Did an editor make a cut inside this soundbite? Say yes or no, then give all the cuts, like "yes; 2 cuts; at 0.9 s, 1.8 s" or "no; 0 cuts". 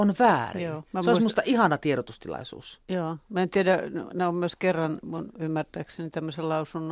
no; 0 cuts